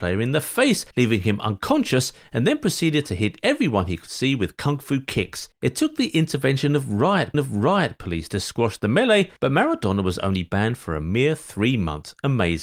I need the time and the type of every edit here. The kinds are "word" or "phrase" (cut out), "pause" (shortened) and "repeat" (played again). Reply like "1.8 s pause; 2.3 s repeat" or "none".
0.9 s pause; 5.5 s pause; 7.3 s repeat; 9.4 s pause